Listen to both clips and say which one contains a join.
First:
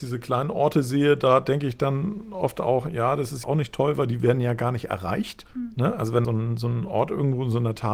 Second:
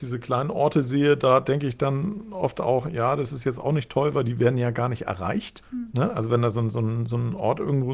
first; 2 cuts; at 3.4 s, 6.2 s

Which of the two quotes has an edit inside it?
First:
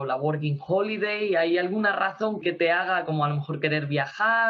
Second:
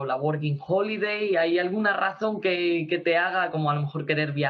first; 1 cut; at 2.4 s

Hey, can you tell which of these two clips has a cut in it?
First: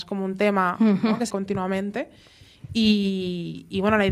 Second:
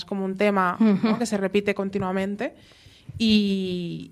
first; 1 cut; at 1.3 s

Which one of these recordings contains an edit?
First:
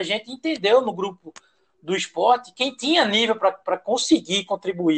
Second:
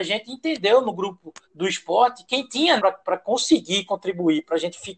second; 2 cuts; at 1.4 s, 2.8 s

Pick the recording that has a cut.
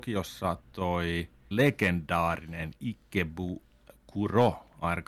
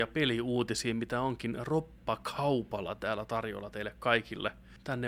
first; 1 cut; at 1.5 s

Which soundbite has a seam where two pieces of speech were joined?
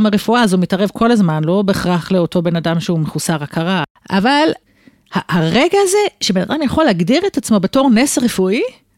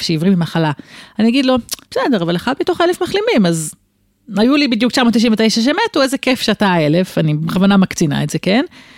second; 1 cut; at 1.8 s

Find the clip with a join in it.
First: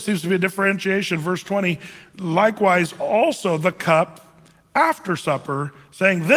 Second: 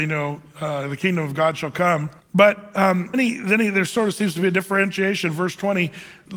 second; 2 cuts; at 2.2 s, 3.1 s

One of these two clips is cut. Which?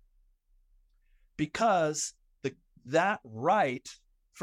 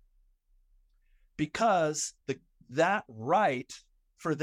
second; 1 cut; at 2.2 s

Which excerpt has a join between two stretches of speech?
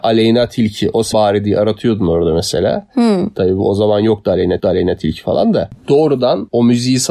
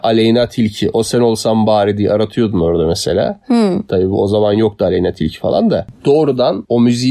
first; 2 cuts; at 1.1 s, 4.6 s

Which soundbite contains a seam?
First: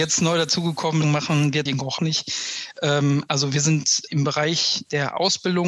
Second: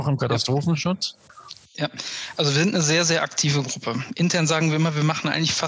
first; 4 cuts; at 1.0 s, 1.7 s, 2.0 s, 4.1 s

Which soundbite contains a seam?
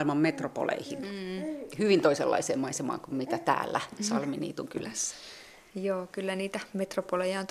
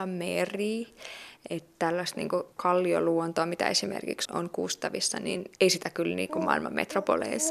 second; 3 cuts; at 2.5 s, 4.2 s, 5.6 s

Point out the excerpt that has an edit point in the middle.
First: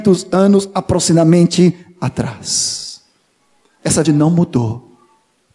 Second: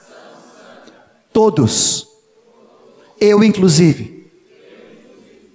first; 1 cut; at 4.0 s

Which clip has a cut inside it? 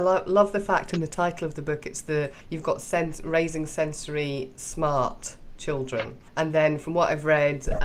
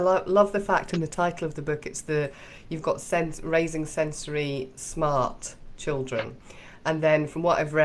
first; 2 cuts; at 2.4 s, 6.3 s

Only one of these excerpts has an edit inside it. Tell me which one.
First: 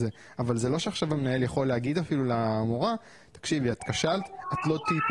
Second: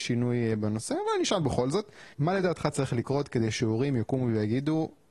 second; 1 cut; at 2.1 s

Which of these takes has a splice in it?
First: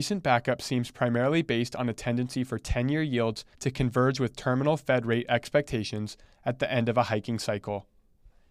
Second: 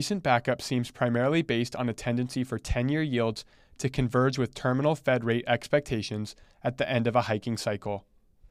first; 1 cut; at 3.5 s

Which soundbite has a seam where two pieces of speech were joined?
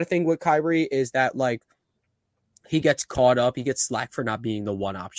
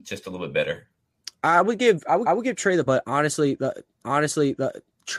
second; 3 cuts; at 2.3 s, 2.9 s, 4.0 s

